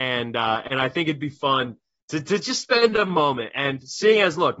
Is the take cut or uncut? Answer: uncut